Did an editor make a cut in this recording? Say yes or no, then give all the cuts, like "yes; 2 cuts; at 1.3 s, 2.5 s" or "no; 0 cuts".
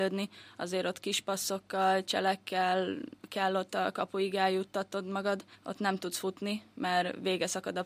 yes; 2 cuts; at 3.2 s, 5.5 s